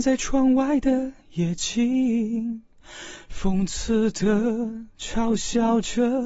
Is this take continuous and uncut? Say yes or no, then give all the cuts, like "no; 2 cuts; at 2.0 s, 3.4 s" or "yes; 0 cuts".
no; 1 cut; at 4.9 s